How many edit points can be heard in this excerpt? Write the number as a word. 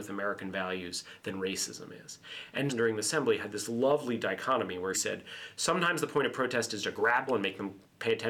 four